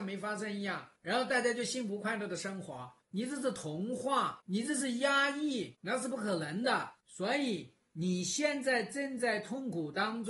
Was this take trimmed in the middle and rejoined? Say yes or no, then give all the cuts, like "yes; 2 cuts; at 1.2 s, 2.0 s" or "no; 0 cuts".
yes; 2 cuts; at 1.0 s, 3.0 s